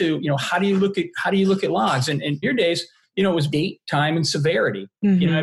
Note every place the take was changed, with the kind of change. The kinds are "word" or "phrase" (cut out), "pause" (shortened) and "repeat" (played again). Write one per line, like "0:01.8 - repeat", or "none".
0:02.4 - phrase
0:03.5 - word